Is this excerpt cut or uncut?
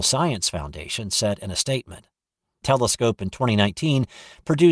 cut